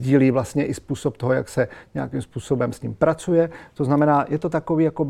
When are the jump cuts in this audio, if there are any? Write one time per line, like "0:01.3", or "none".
none